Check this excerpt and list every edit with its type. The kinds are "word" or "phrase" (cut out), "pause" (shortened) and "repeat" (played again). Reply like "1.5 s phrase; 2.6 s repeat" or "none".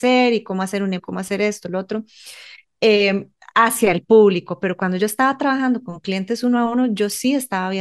1.0 s word